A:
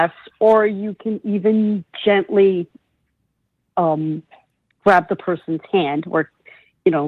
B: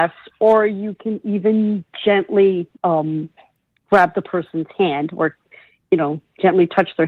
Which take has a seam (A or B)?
B